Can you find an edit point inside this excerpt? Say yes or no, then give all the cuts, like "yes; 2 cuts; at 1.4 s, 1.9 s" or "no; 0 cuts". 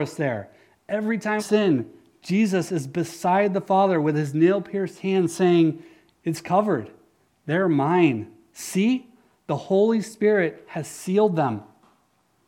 yes; 1 cut; at 1.4 s